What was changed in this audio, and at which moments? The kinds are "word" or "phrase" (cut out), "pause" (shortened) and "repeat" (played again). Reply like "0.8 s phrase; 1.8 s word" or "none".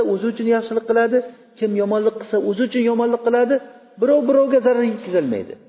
none